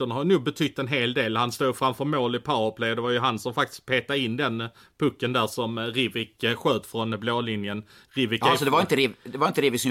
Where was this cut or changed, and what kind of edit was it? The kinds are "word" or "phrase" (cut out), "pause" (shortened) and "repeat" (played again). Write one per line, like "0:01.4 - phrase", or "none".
none